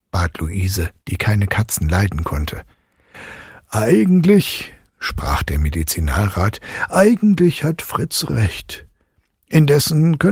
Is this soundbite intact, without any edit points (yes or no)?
yes